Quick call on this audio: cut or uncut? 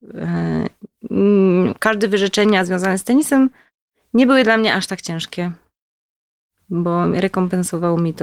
uncut